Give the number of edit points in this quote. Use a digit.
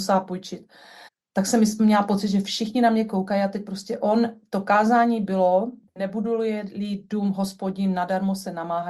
1